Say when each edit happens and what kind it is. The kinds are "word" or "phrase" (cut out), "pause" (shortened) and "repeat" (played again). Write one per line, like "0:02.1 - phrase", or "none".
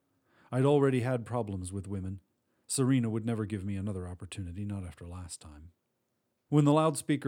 none